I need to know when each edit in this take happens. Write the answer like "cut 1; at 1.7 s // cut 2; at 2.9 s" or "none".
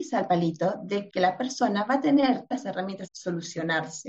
cut 1; at 1.1 s // cut 2; at 2.5 s // cut 3; at 3.1 s